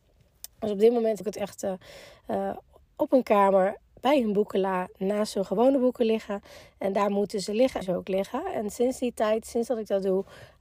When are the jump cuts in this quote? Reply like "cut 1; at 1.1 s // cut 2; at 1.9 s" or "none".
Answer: cut 1; at 1.2 s // cut 2; at 7.8 s